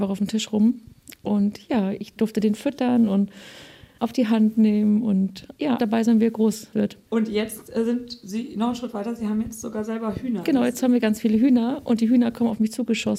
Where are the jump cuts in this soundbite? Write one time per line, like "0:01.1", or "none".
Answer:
0:05.8